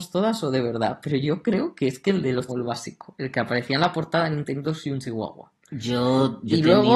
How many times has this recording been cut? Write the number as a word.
one